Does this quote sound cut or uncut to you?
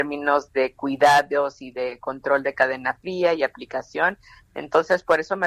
uncut